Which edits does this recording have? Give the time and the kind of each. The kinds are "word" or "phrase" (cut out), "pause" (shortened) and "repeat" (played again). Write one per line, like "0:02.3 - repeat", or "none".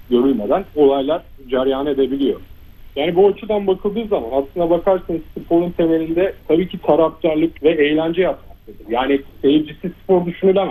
0:06.4 - pause
0:07.6 - pause